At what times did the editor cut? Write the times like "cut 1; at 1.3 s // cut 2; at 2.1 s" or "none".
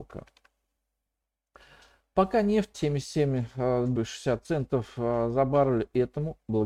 cut 1; at 2.7 s // cut 2; at 4.0 s